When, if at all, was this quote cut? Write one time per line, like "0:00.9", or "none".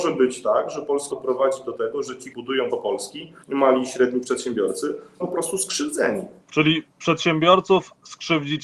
0:01.1
0:02.3
0:02.7
0:03.4
0:05.2
0:06.4